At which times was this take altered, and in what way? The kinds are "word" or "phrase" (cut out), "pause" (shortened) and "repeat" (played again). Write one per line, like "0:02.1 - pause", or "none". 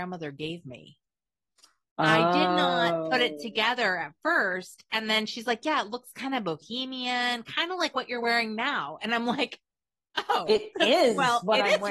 none